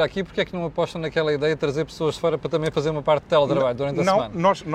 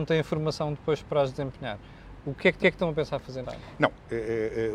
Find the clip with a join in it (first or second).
second